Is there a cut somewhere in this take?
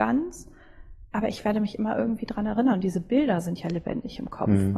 no; 0 cuts

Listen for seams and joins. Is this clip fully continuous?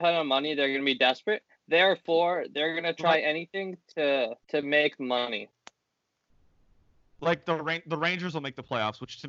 no; 2 cuts; at 1.5 s, 4.4 s

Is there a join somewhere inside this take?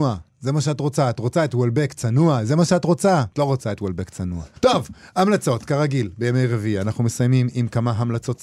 yes; 2 cuts; at 3.3 s, 4.6 s

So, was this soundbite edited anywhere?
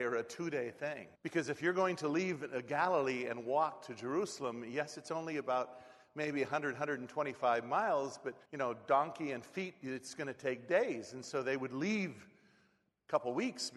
yes; 2 cuts; at 1.1 s, 8.4 s

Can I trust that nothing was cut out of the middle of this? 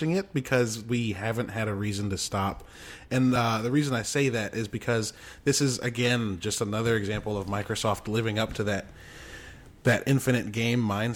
yes; 0 cuts

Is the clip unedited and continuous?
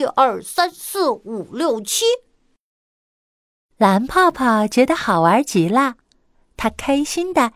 yes; 0 cuts

